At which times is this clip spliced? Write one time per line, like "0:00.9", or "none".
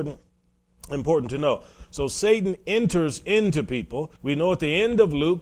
0:04.2